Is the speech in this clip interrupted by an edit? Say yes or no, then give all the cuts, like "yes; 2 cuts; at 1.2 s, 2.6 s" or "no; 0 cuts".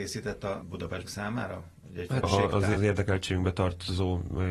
yes; 3 cuts; at 1.1 s, 2.2 s, 2.8 s